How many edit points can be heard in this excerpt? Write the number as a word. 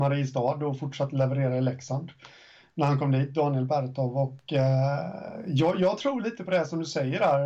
zero